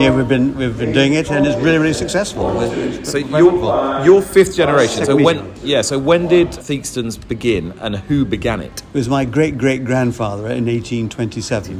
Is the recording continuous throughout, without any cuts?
no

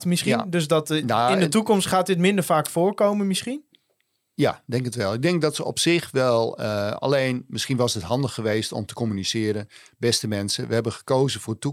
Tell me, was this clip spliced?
no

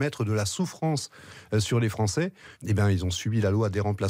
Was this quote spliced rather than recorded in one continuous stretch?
yes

